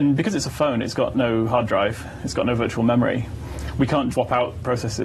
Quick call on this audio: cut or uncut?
cut